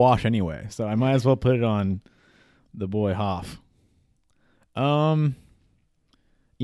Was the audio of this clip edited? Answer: no; 0 cuts

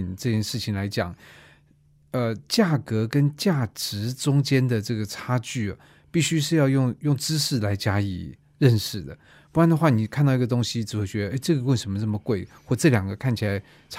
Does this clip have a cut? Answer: no; 0 cuts

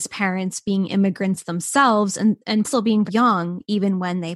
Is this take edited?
yes; 2 cuts; at 2.6 s, 3.1 s

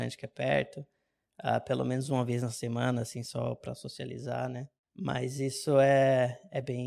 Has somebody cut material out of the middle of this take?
no; 0 cuts

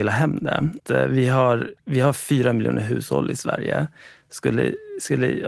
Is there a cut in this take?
yes; 1 cut; at 1.8 s

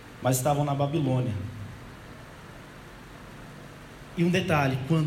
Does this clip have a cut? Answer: no; 0 cuts

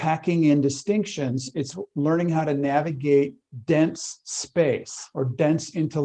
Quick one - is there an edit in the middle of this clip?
no; 0 cuts

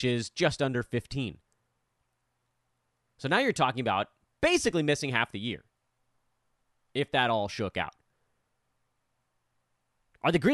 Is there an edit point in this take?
no; 0 cuts

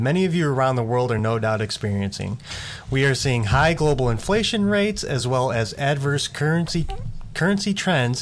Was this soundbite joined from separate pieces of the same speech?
no; 0 cuts

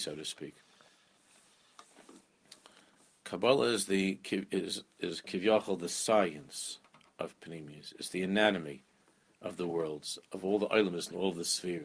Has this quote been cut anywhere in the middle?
no; 0 cuts

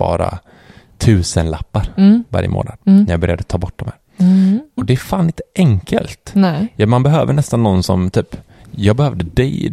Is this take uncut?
yes; 0 cuts

